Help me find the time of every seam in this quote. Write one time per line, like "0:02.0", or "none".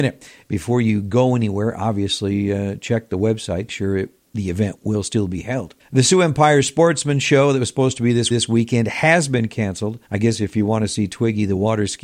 0:03.7
0:05.8
0:08.3
0:10.0